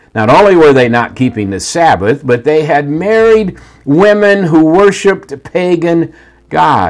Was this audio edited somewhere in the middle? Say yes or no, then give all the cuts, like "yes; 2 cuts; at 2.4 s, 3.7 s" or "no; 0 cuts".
no; 0 cuts